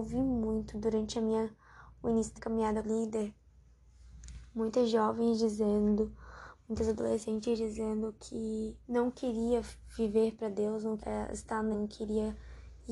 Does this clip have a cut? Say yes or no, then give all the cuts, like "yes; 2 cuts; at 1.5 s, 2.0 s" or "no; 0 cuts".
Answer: yes; 5 cuts; at 2.4 s, 2.8 s, 8.8 s, 11.0 s, 11.7 s